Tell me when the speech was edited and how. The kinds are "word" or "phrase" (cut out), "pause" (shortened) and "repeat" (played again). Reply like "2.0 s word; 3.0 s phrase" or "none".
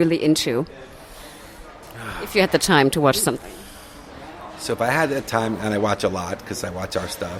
none